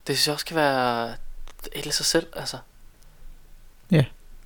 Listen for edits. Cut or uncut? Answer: cut